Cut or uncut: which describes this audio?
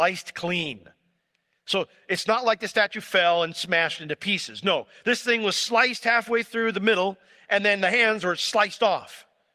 uncut